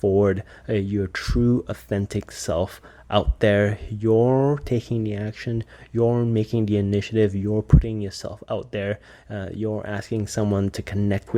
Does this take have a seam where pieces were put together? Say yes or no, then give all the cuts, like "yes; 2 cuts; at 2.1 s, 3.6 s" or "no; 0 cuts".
no; 0 cuts